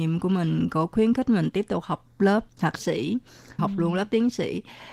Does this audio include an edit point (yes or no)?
yes